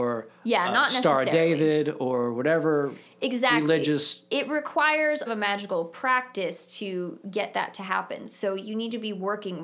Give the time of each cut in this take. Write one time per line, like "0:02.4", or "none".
0:05.3